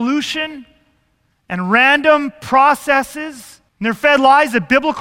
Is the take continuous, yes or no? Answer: no